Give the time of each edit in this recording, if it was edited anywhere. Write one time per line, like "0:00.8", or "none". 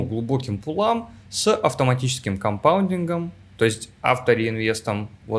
none